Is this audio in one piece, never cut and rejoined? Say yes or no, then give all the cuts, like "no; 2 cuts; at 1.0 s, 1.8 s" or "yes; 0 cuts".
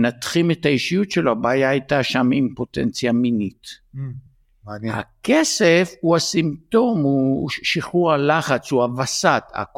yes; 0 cuts